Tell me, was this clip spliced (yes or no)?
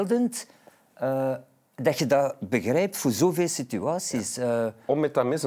no